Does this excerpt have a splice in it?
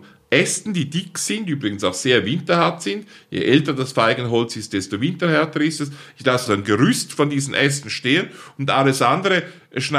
yes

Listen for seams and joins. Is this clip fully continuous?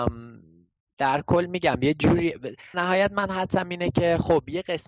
no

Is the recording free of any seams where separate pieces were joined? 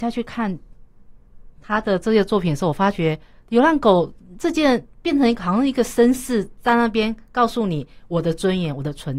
no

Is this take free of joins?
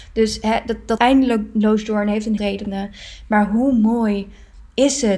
no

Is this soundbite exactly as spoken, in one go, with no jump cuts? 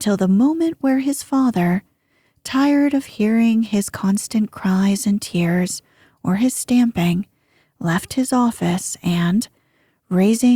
yes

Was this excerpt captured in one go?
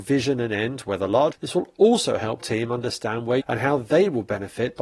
no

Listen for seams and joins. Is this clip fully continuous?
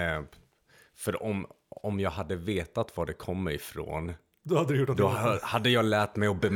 yes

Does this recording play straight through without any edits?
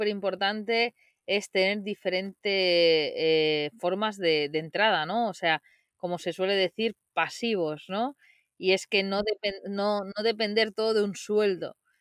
yes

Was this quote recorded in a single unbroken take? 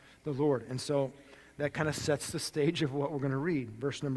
yes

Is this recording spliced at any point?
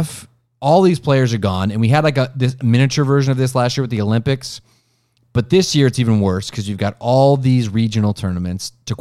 no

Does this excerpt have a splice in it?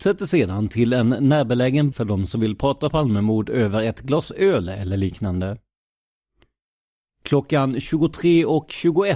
yes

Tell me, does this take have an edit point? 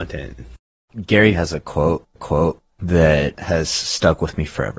yes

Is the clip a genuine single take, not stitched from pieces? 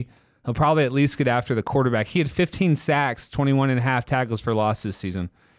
yes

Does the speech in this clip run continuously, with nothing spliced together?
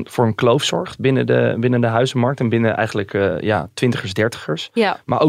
yes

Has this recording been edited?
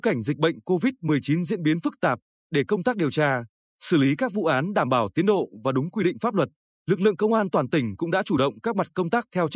no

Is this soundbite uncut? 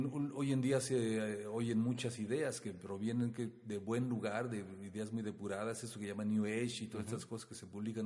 yes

